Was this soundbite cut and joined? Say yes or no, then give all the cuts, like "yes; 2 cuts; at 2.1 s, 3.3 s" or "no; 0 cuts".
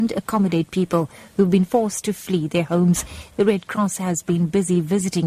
no; 0 cuts